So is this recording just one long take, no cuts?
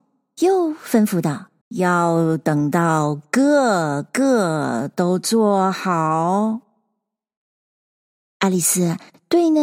no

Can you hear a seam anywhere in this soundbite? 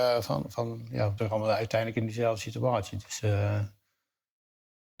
yes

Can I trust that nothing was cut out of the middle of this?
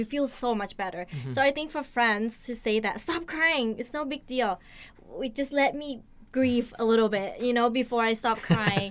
yes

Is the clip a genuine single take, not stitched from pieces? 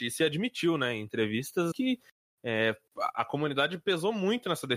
no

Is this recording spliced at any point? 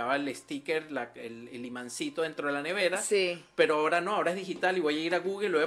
no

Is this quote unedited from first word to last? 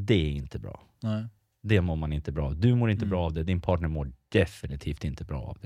yes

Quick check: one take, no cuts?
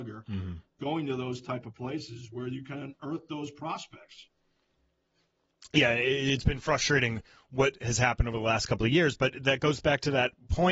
yes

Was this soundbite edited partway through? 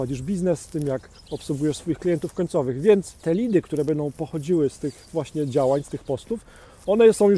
yes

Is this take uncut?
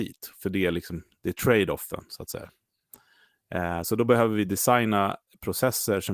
yes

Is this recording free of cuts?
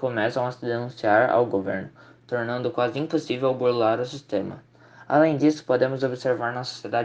yes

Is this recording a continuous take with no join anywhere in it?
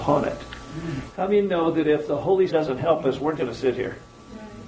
no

